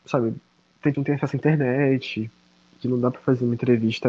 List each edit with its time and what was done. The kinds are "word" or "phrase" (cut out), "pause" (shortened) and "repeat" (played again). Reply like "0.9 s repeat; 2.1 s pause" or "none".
0.9 s word